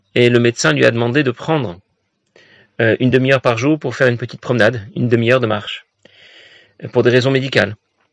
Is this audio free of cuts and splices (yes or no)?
yes